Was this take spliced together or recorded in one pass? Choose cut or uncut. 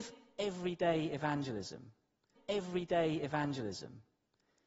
cut